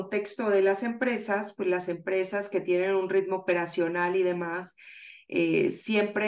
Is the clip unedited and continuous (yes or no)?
yes